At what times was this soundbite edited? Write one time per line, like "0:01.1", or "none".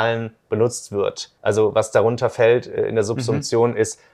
0:01.4